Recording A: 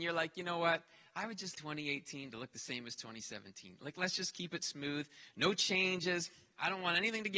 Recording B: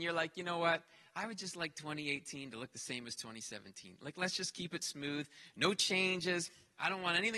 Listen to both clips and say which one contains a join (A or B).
A